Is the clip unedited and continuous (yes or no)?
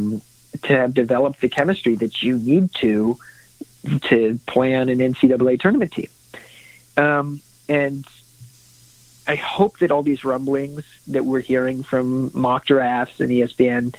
yes